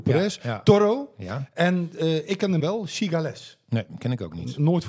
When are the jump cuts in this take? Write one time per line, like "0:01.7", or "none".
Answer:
0:02.6